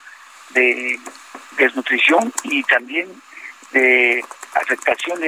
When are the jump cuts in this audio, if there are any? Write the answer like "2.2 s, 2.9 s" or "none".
1.5 s